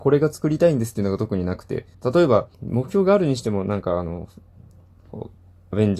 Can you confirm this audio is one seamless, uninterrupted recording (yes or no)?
no